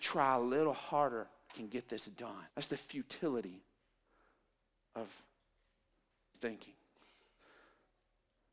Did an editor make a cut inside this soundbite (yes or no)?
yes